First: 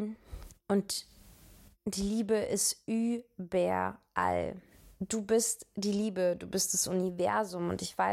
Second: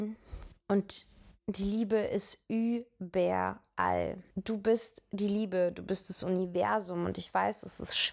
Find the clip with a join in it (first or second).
second